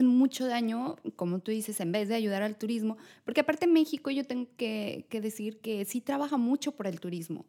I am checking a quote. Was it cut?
no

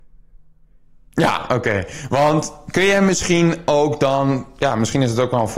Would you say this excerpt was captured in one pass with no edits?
yes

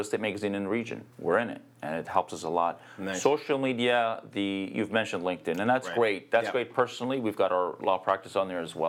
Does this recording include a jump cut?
yes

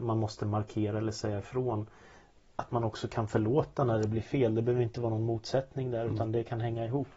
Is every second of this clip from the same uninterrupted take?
yes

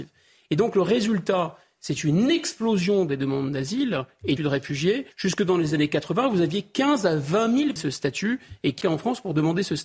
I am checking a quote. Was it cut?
yes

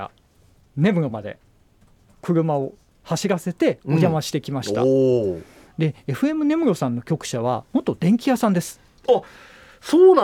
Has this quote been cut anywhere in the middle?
no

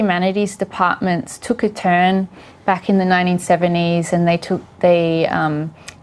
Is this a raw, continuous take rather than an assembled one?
yes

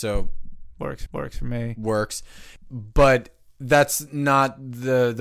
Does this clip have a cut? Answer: yes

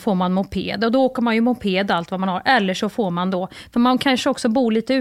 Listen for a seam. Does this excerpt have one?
no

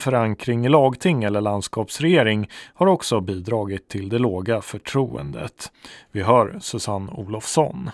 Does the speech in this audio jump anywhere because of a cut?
no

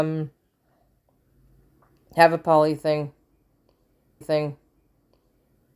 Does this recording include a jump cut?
yes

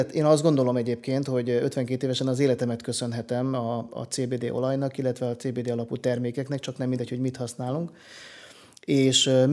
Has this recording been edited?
no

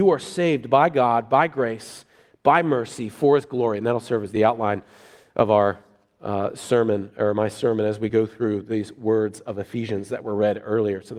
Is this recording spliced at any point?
no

